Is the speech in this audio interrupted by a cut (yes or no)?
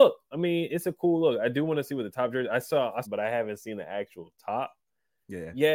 yes